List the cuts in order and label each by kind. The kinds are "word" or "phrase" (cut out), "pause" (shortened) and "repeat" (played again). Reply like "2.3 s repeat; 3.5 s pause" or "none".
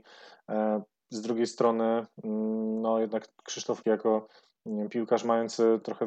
3.8 s word

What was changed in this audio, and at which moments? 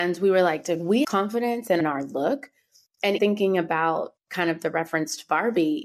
1.0 s word; 1.8 s phrase; 3.2 s word

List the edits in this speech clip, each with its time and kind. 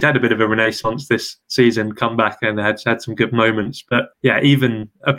1.4 s pause; 4.1 s pause

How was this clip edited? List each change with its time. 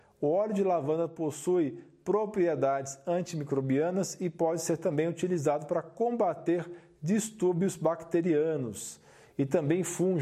none

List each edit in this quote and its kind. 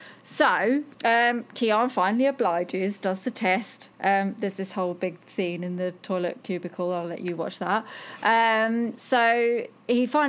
0.9 s pause; 3.9 s pause

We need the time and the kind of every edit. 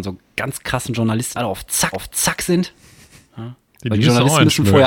1.3 s word; 1.9 s repeat

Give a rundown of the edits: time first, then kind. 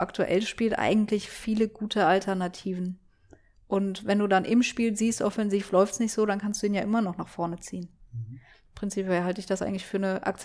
none

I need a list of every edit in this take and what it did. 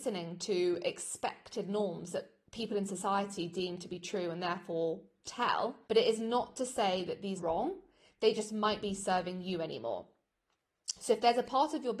5.8 s pause; 7.4 s word; 8.8 s word

